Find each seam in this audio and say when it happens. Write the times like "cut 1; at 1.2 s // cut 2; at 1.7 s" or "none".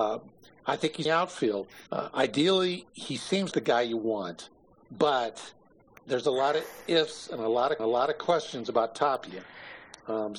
cut 1; at 1.1 s // cut 2; at 1.9 s // cut 3; at 3.5 s // cut 4; at 5.7 s // cut 5; at 7.8 s